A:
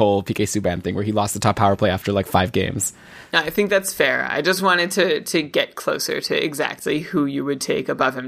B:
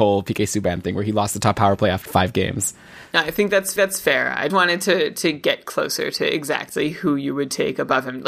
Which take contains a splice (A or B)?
B